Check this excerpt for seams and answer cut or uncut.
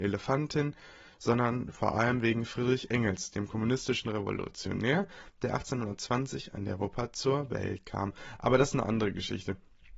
uncut